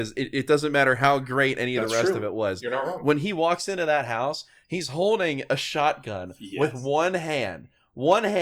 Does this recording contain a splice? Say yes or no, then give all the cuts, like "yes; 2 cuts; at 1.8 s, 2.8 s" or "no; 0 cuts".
no; 0 cuts